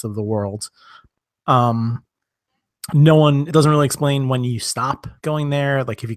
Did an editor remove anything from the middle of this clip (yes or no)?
yes